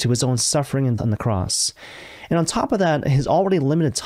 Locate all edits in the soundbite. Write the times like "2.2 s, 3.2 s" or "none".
1.0 s